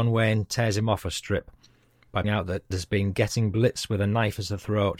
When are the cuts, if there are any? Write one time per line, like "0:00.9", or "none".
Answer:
0:02.2
0:02.7